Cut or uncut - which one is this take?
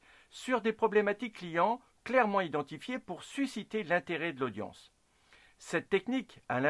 uncut